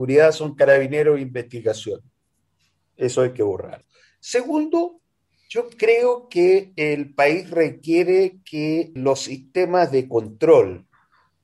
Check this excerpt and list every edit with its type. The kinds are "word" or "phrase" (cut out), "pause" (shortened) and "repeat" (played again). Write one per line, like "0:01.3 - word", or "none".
none